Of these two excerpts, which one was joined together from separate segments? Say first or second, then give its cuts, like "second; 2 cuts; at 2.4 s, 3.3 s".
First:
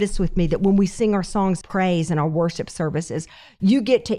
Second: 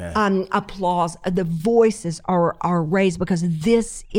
first; 1 cut; at 1.6 s